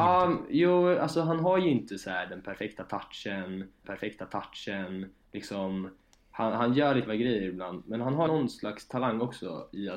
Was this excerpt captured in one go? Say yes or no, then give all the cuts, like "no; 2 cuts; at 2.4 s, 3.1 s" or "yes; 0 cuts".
no; 3 cuts; at 3.8 s, 7.1 s, 8.3 s